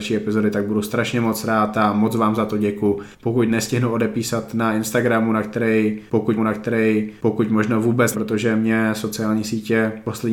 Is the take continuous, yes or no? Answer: no